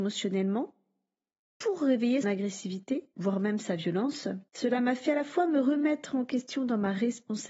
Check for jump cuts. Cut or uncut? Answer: cut